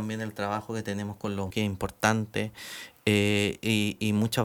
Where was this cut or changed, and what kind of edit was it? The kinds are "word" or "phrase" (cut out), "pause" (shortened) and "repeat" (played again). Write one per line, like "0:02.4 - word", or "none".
0:01.5 - word